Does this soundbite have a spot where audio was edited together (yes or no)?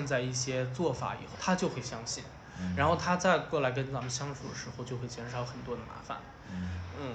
yes